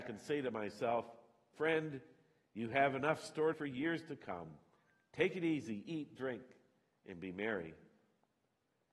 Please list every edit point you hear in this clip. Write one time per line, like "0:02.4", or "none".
0:01.5
0:03.5